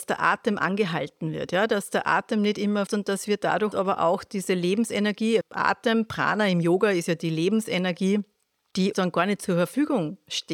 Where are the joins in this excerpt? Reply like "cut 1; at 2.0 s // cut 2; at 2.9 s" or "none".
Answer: cut 1; at 2.9 s // cut 2; at 3.7 s // cut 3; at 5.4 s // cut 4; at 8.9 s